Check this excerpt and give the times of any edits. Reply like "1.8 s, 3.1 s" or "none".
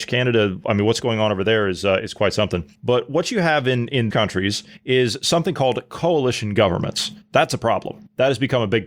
4.1 s